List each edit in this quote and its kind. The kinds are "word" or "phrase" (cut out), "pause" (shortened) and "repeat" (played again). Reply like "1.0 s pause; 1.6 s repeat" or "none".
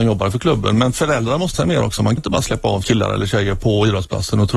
1.5 s word; 2.2 s word; 2.8 s word